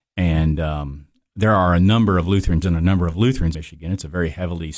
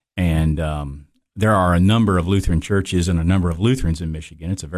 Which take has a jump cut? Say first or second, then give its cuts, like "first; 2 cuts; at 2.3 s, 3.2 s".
first; 2 cuts; at 2.6 s, 3.5 s